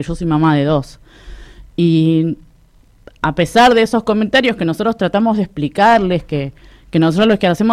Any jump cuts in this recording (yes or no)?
no